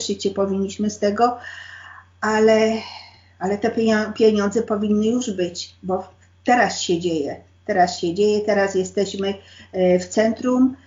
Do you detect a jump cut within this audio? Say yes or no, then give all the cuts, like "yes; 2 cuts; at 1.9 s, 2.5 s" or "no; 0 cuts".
no; 0 cuts